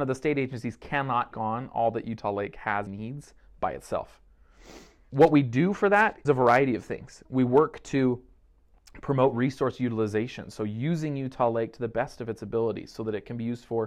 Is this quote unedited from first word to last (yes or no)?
no